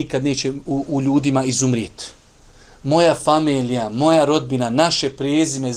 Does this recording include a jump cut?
no; 0 cuts

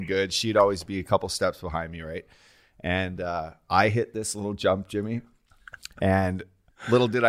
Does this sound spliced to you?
no; 0 cuts

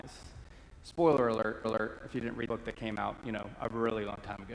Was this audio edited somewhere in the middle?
yes; 2 cuts; at 1.6 s, 2.5 s

